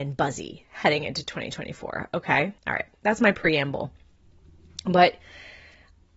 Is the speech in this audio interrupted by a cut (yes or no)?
yes